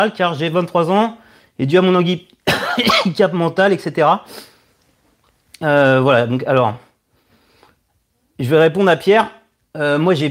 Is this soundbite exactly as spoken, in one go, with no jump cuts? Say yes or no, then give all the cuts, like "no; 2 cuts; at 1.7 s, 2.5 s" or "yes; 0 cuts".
yes; 0 cuts